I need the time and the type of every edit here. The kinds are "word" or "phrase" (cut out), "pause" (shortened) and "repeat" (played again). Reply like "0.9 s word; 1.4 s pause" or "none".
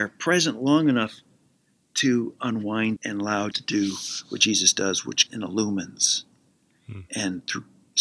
3.0 s word; 3.5 s word; 5.3 s word